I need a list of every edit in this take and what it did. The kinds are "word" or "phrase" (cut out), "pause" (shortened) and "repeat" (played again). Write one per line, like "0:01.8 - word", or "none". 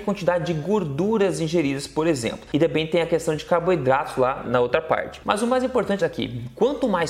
0:04.4 - word
0:06.0 - phrase